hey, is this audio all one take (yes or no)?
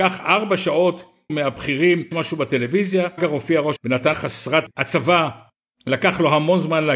no